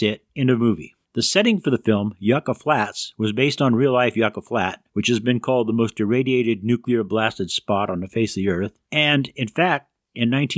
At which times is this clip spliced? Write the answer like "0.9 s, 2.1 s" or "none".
1.0 s, 4.9 s, 8.8 s